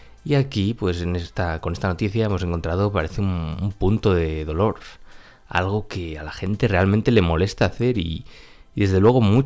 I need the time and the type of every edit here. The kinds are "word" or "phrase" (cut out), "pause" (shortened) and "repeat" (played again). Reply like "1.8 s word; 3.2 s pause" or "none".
none